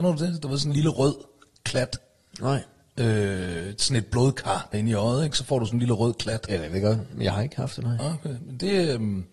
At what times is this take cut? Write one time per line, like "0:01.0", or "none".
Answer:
0:04.7